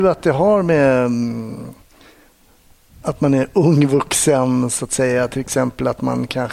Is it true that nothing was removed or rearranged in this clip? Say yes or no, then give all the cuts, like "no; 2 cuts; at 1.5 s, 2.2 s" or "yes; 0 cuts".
yes; 0 cuts